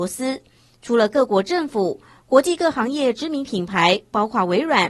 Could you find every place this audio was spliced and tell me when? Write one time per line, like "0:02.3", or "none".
none